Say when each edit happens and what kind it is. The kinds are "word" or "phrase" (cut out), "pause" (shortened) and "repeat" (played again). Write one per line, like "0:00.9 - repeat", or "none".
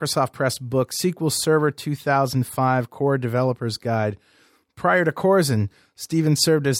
none